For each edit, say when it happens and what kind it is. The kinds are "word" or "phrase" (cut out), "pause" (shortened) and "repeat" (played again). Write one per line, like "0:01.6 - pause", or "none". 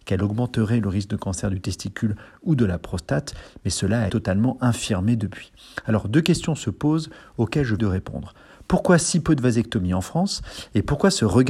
0:04.1 - word
0:07.8 - word